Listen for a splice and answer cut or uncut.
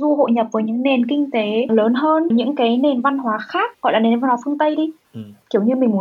cut